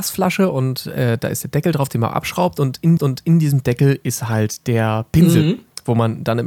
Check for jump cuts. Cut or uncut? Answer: cut